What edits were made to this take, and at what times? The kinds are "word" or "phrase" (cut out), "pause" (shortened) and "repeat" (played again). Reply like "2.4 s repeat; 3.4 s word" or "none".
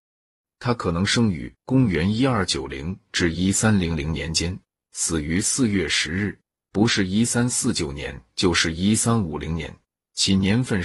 none